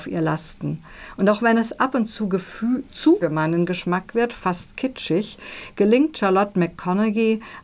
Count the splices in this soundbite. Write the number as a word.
one